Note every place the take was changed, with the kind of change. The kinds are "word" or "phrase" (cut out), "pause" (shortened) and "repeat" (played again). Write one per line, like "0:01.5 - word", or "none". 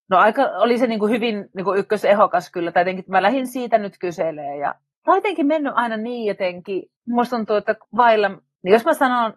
0:07.0 - pause
0:07.8 - pause